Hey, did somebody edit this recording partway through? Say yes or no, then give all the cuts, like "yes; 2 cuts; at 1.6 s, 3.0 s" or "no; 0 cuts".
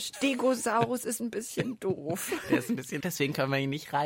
yes; 1 cut; at 3.0 s